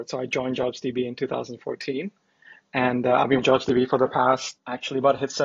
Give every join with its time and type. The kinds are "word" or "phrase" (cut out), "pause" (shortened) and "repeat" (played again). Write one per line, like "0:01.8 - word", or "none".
0:03.4 - word